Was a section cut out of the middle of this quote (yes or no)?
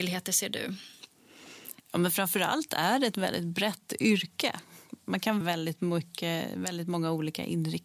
yes